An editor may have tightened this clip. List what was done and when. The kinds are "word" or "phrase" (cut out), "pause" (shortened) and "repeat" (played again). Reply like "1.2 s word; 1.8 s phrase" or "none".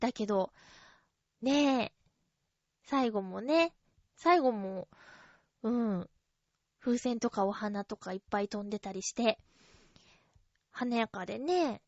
none